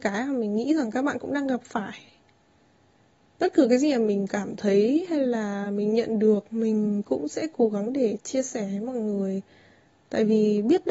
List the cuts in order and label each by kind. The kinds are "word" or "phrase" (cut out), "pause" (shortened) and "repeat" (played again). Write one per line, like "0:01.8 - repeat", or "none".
none